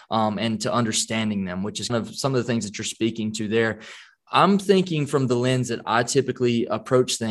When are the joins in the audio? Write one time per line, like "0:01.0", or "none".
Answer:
0:01.9